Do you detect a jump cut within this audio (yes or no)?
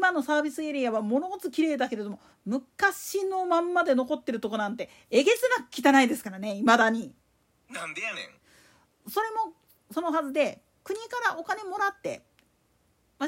yes